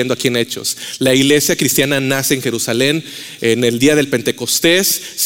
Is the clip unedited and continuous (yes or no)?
yes